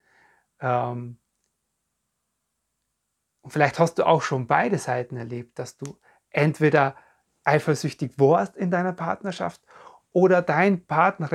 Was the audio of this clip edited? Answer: no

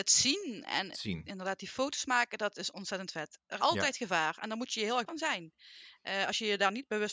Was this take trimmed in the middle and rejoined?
yes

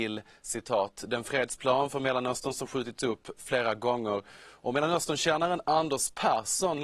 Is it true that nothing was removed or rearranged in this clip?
yes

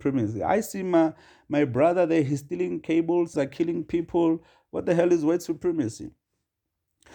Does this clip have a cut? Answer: yes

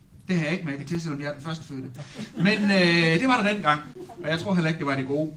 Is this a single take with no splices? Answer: yes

